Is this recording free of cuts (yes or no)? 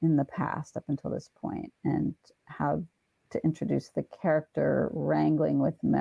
yes